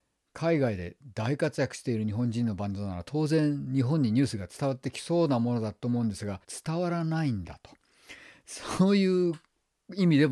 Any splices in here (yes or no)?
yes